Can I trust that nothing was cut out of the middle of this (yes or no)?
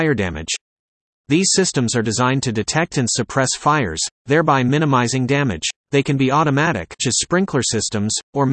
no